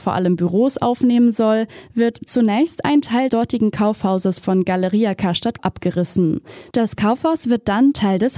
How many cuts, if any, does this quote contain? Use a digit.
2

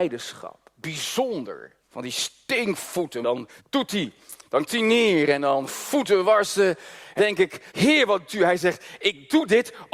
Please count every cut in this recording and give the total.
8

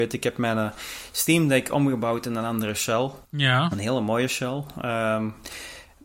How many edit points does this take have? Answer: 1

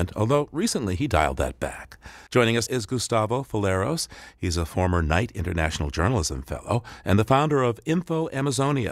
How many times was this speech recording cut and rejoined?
2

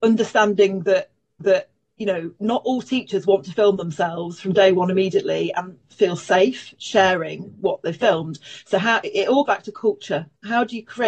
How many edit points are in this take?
2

